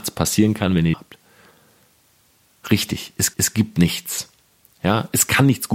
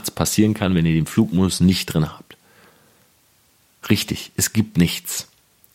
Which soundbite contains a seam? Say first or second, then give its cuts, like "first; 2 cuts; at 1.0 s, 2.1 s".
first; 2 cuts; at 0.9 s, 3.3 s